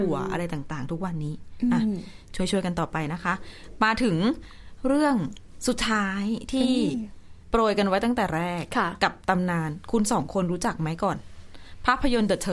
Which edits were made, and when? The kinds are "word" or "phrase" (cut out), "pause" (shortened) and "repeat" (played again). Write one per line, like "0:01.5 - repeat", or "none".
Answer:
0:07.4 - pause